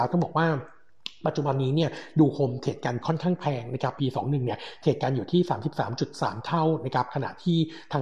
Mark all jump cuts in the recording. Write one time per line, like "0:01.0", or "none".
0:03.0
0:04.0